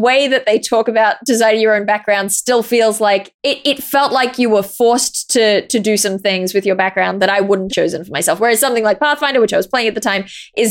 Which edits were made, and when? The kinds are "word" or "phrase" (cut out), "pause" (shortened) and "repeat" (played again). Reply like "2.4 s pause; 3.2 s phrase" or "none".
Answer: 3.4 s pause; 7.7 s phrase